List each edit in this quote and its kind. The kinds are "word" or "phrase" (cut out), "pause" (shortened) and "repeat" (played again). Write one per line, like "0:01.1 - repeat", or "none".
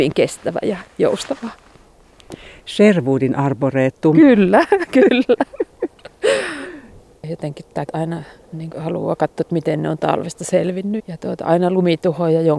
0:07.9 - word
0:08.7 - word
0:11.0 - word